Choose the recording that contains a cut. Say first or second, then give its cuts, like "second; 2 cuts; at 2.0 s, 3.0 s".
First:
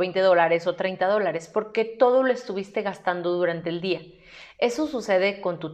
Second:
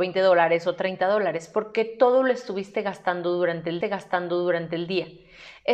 second; 1 cut; at 3.8 s